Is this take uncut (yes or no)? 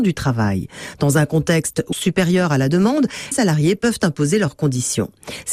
no